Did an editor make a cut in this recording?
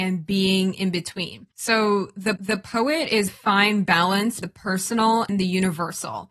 yes; 5 cuts; at 1.5 s, 2.4 s, 3.3 s, 4.4 s, 5.3 s

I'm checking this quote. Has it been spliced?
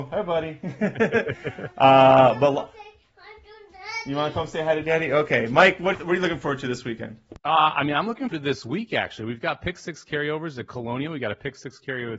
yes; 2 cuts; at 5.9 s, 8.3 s

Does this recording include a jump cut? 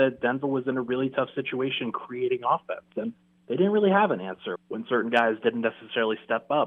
yes; 1 cut; at 4.6 s

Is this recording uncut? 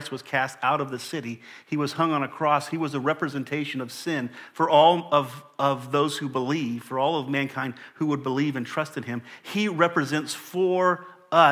yes; 0 cuts

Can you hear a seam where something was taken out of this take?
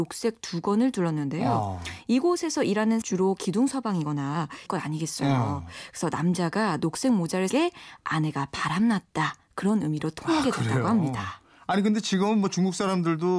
yes; 3 cuts; at 3.0 s, 4.7 s, 7.5 s

